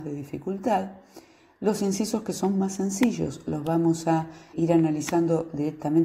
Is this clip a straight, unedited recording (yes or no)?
no